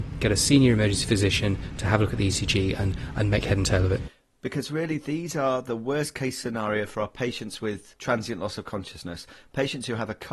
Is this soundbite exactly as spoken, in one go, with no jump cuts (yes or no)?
yes